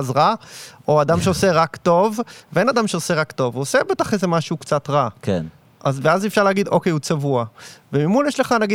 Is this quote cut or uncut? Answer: uncut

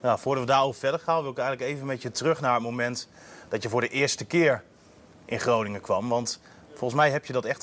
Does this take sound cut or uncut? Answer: uncut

